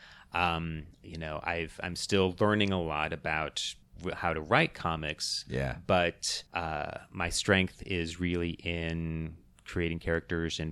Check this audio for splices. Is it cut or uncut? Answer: cut